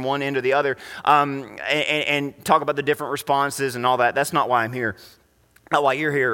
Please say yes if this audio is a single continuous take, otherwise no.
yes